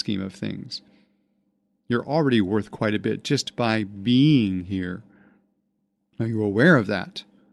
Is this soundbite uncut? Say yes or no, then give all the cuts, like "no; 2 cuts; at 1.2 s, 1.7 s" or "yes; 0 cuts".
yes; 0 cuts